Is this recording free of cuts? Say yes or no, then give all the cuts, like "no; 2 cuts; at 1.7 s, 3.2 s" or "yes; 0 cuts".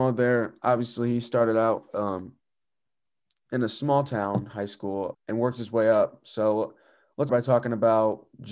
no; 2 cuts; at 5.1 s, 7.3 s